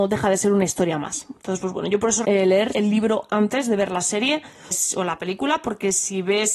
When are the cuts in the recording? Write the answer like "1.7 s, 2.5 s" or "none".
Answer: 2.2 s, 2.7 s, 4.7 s